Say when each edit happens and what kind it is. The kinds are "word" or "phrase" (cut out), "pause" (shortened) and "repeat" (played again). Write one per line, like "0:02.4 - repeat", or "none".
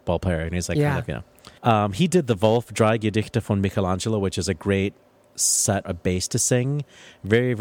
0:01.6 - pause
0:05.8 - word